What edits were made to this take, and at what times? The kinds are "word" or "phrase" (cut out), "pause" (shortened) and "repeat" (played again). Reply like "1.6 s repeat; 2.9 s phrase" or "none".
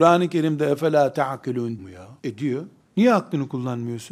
1.8 s word; 2.2 s pause; 2.8 s pause